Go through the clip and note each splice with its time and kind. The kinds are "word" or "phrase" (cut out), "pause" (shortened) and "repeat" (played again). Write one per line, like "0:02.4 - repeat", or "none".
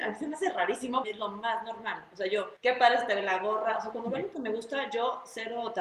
0:01.0 - phrase
0:02.6 - pause